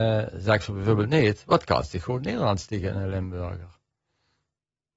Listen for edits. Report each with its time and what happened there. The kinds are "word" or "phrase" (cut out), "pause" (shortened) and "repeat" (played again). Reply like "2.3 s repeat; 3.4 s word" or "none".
2.7 s word